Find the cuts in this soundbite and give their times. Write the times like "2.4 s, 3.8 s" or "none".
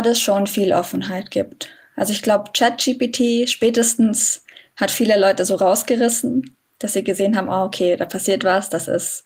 none

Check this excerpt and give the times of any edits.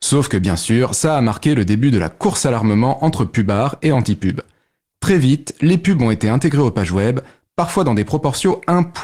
none

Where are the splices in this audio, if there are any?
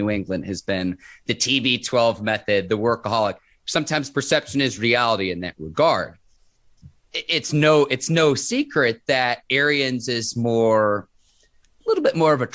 none

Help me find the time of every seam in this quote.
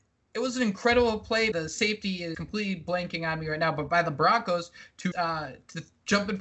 1.5 s, 2.3 s, 5.1 s

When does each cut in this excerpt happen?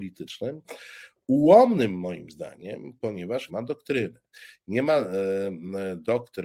3.5 s

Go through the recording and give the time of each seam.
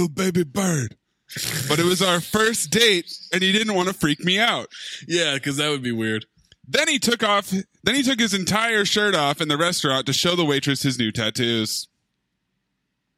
none

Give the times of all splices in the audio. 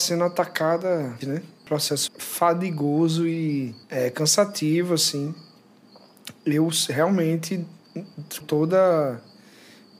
1.2 s, 1.7 s, 2.1 s, 3.8 s, 8.4 s

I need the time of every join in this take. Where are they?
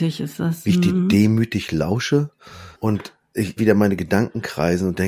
2.7 s, 3.6 s

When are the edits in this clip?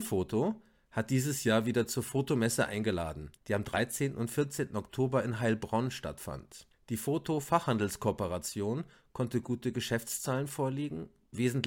3.4 s, 6.7 s

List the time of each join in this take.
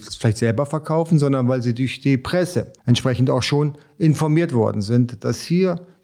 2.8 s

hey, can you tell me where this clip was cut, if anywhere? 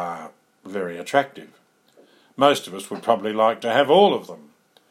none

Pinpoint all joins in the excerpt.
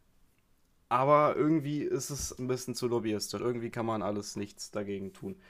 2.4 s, 3.4 s

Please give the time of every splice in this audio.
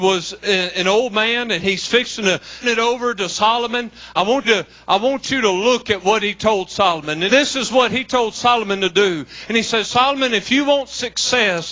2.6 s, 4.4 s, 7.3 s

